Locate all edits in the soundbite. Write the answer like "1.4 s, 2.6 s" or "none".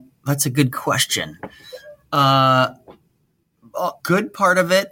4.0 s